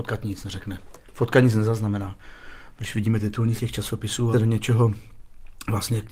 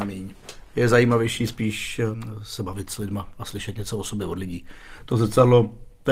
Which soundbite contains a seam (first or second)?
first